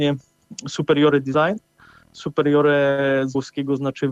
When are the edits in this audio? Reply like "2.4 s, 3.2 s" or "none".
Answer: none